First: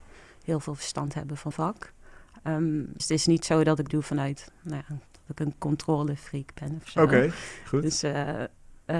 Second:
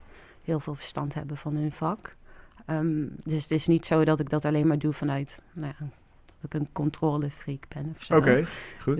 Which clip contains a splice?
first; 4 cuts; at 1.5 s, 3.0 s, 3.9 s, 5.1 s

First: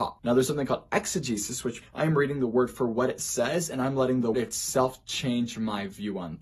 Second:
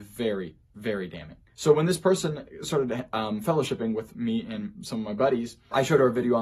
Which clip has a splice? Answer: first; 2 cuts; at 1.8 s, 4.3 s

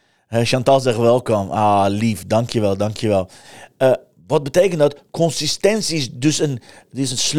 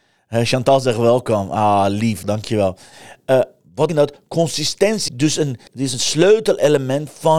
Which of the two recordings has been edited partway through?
second; 4 cuts; at 2.2 s, 3.9 s, 5.1 s, 5.7 s

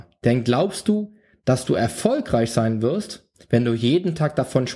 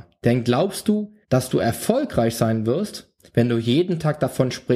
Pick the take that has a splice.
second; 1 cut; at 1.2 s

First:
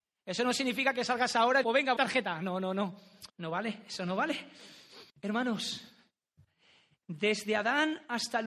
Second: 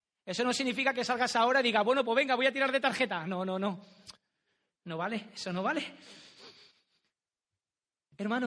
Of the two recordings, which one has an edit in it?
first; 4 cuts; at 1.6 s, 2.0 s, 3.3 s, 5.1 s

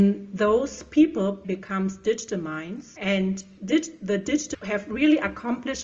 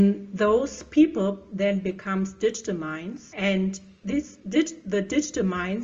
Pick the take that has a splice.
first; 3 cuts; at 1.4 s, 3.6 s, 4.5 s

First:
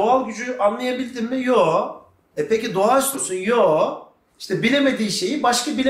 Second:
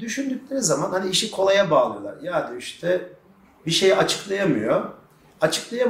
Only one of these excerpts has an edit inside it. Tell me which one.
first; 1 cut; at 3.1 s

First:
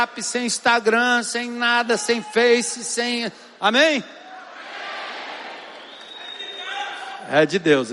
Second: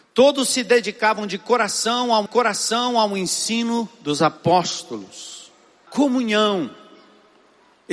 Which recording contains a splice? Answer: second; 2 cuts; at 2.3 s, 5.9 s

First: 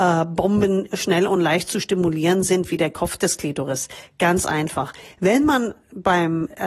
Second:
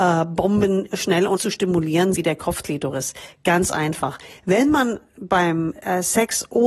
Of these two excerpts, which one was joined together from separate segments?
second; 3 cuts; at 1.4 s, 2.1 s, 2.6 s

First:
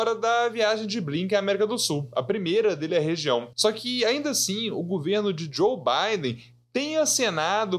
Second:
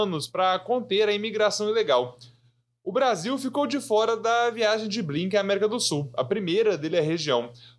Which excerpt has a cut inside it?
first; 1 cut; at 3.5 s

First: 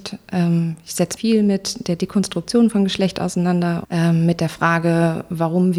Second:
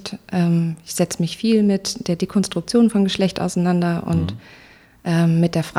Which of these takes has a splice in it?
first; 2 cuts; at 1.2 s, 3.8 s

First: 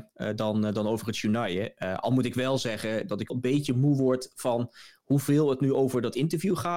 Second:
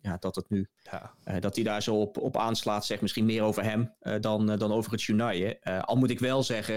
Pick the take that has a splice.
first; 1 cut; at 3.3 s

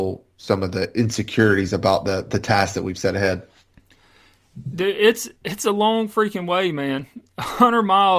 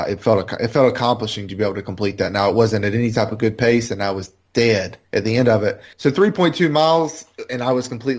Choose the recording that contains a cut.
second; 2 cuts; at 5.0 s, 5.9 s

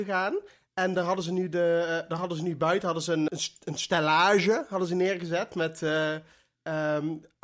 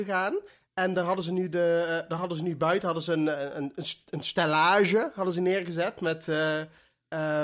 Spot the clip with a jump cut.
first; 1 cut; at 3.3 s

